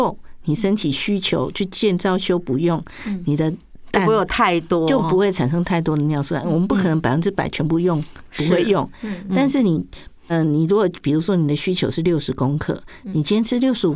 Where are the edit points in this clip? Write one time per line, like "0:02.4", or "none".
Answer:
0:10.3